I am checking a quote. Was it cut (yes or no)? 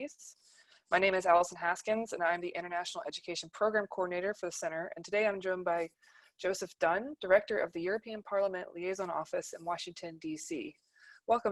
no